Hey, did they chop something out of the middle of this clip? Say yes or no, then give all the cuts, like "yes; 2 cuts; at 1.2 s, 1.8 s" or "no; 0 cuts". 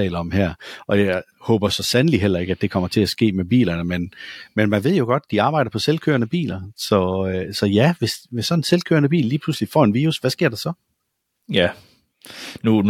no; 0 cuts